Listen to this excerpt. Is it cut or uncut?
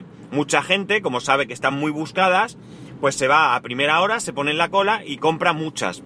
uncut